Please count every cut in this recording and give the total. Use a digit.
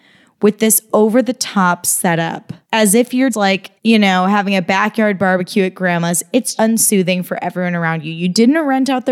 4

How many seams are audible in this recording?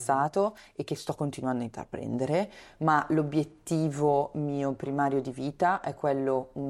0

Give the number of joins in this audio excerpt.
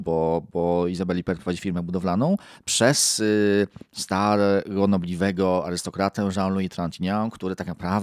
1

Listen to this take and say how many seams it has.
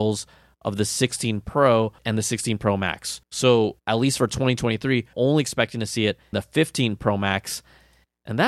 4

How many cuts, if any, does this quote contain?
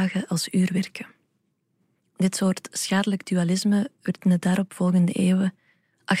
0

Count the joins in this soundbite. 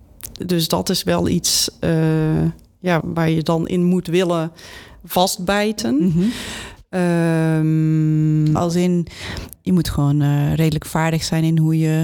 3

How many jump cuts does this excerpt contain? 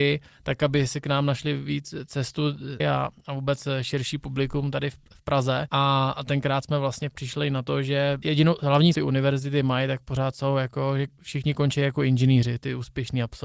2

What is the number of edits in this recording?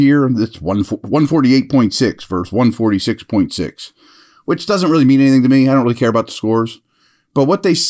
0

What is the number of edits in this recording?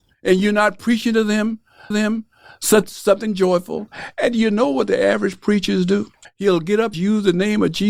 3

